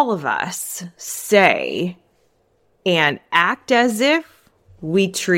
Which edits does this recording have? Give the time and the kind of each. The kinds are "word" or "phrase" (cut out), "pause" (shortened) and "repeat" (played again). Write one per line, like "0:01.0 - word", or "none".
none

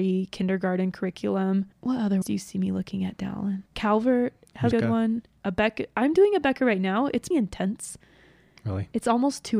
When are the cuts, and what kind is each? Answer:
0:01.7 - pause
0:02.2 - word
0:03.7 - pause
0:04.7 - phrase
0:07.3 - word

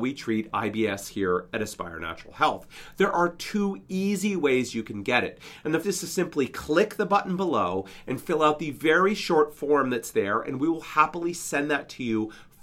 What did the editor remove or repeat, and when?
0:05.8 - word

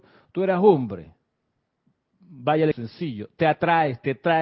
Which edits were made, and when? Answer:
0:02.7 - word

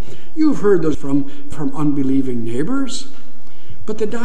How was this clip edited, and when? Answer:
0:00.9 - word
0:01.5 - word

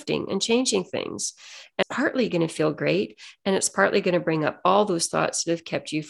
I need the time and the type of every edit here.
0:01.8 - word

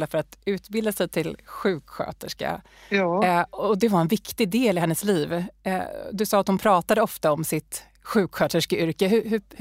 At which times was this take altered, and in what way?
none

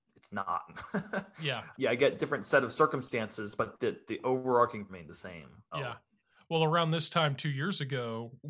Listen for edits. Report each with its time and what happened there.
0:01.7 - word
0:03.6 - word
0:04.9 - word
0:05.7 - word

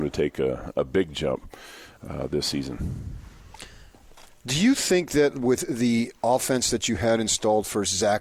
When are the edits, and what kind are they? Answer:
none

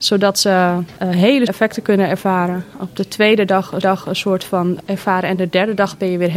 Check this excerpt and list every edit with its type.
0:01.5 - word
0:03.8 - repeat
0:04.9 - word

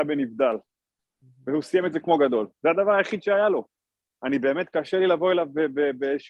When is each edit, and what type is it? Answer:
none

